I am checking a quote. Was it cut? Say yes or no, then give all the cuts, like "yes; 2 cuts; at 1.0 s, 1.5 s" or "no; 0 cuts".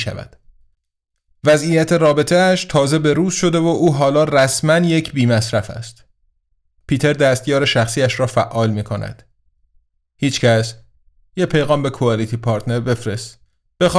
no; 0 cuts